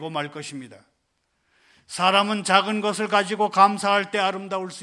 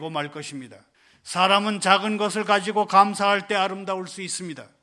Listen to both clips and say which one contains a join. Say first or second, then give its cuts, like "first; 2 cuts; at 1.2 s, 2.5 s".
second; 1 cut; at 0.9 s